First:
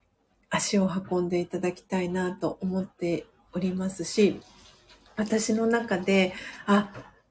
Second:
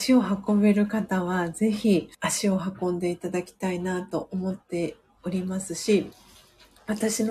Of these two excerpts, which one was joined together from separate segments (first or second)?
second